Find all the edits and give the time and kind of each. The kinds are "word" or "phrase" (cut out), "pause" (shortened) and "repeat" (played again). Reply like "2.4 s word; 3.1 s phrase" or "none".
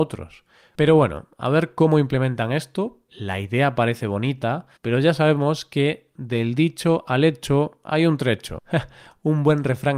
3.1 s word; 4.8 s pause